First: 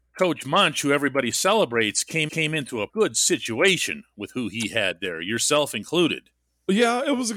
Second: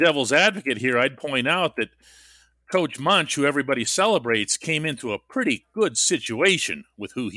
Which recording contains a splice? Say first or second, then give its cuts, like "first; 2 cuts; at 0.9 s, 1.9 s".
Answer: first; 2 cuts; at 2.3 s, 2.9 s